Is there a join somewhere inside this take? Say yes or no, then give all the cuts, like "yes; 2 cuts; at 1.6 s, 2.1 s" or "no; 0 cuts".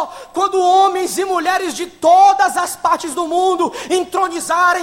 no; 0 cuts